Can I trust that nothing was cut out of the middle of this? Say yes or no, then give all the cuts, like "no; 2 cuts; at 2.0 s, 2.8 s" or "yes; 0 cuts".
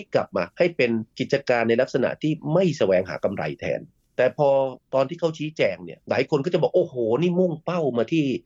yes; 0 cuts